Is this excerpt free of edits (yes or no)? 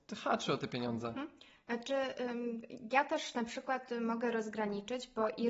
yes